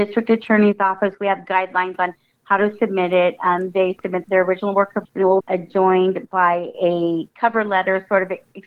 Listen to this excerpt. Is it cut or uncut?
cut